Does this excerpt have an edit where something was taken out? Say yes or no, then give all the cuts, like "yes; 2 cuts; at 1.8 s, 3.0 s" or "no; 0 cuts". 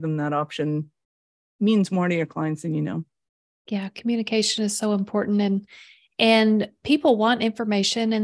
no; 0 cuts